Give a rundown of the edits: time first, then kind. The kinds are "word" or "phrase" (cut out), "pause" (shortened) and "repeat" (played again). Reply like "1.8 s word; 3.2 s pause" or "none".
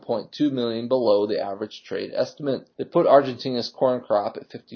2.7 s pause